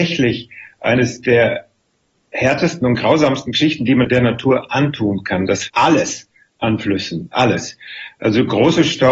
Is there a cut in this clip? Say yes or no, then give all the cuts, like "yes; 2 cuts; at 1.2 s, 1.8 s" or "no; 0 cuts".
yes; 1 cut; at 5.7 s